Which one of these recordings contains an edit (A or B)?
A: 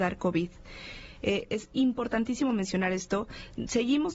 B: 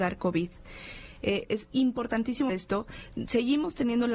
B